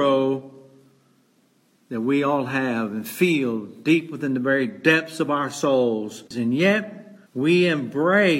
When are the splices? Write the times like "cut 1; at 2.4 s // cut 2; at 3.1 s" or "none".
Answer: cut 1; at 6.3 s // cut 2; at 7.3 s